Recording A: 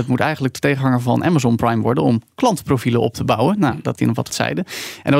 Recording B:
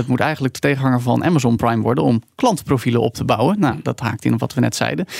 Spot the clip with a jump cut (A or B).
A